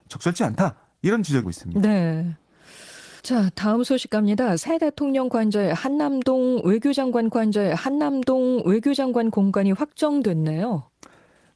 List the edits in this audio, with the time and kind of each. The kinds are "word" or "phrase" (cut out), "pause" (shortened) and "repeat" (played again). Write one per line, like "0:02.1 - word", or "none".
0:01.4 - word
0:03.2 - pause
0:07.3 - repeat

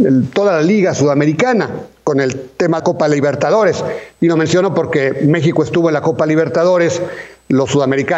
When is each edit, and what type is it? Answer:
0:02.8 - word

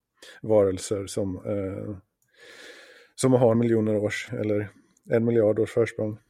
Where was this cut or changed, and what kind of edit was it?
0:03.5 - word
0:04.3 - word

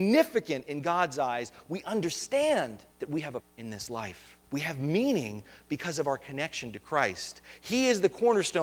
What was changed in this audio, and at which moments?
0:02.9 - pause
0:03.4 - word
0:04.4 - pause

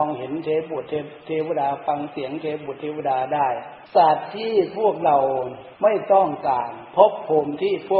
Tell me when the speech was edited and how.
0:03.9 - pause
0:05.7 - pause

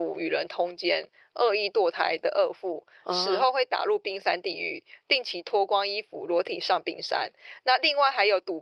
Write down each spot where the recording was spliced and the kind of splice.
none

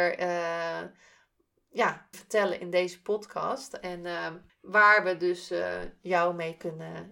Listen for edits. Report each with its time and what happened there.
0:02.1 - word
0:04.5 - pause

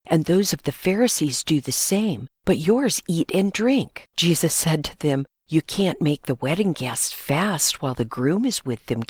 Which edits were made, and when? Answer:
0:02.4 - pause
0:04.1 - pause
0:05.3 - pause

